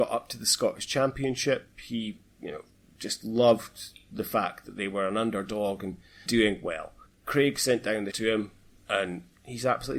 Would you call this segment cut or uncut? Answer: cut